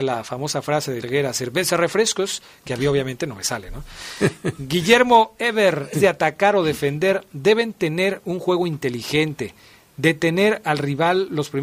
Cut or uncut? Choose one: cut